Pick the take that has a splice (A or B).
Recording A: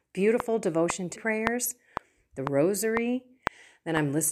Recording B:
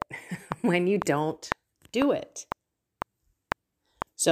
A